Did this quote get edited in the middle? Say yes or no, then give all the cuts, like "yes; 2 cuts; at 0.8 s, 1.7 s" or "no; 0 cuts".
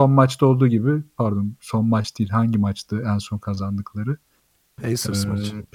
no; 0 cuts